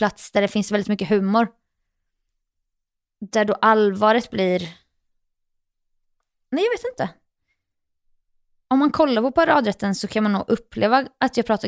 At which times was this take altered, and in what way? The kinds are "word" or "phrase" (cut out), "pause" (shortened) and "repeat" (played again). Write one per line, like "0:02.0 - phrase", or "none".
none